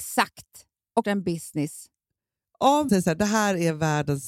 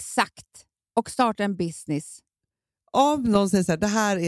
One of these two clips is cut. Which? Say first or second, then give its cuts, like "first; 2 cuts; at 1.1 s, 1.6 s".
first; 2 cuts; at 1.0 s, 2.9 s